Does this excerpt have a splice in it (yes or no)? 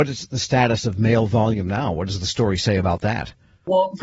no